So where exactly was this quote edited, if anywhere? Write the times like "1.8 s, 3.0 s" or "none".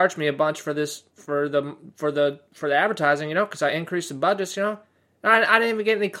1.1 s, 2.5 s